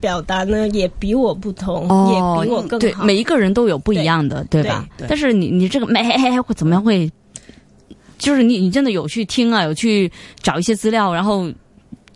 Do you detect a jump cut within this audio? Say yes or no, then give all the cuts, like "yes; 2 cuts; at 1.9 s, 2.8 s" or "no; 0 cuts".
yes; 1 cut; at 10.3 s